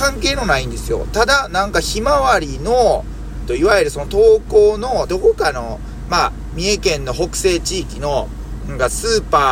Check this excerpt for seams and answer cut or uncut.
cut